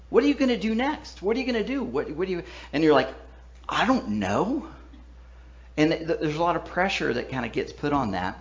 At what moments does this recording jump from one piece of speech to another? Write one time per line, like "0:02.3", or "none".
0:03.7